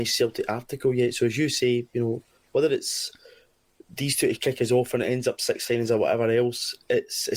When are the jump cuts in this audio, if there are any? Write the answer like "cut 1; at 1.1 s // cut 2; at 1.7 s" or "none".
none